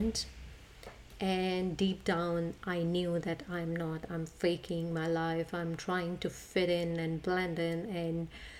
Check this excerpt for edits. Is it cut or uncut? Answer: uncut